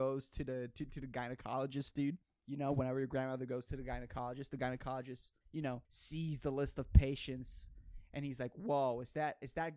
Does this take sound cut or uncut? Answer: cut